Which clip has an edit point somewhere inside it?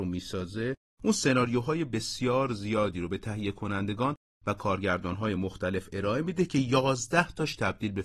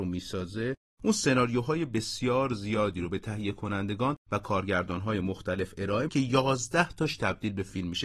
second; 2 cuts; at 4.2 s, 6.1 s

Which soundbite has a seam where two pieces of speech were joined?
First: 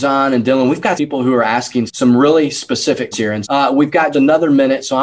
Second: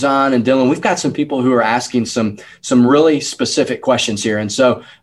first; 5 cuts; at 1.0 s, 1.9 s, 3.1 s, 3.4 s, 4.1 s

